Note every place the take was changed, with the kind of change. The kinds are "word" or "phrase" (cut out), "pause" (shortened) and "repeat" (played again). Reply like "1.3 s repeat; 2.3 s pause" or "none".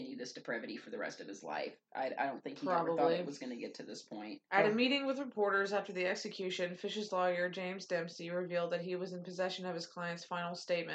4.5 s pause